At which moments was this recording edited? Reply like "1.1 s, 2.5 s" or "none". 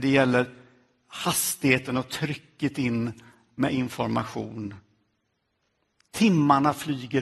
none